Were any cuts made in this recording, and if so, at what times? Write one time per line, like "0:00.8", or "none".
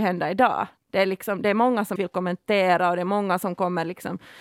0:02.0

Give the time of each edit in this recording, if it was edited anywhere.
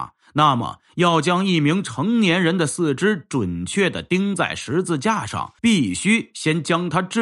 0:05.6

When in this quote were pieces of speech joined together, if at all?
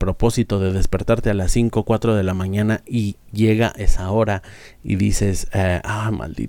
none

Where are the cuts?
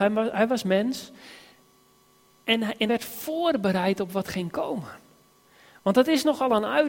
0:02.9

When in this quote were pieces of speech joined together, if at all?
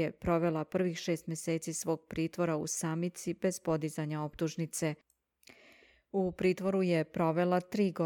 none

